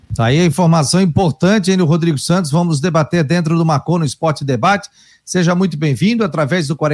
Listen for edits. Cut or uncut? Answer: uncut